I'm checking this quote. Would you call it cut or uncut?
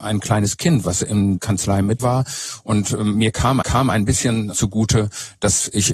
cut